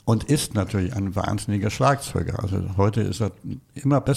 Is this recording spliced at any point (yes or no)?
no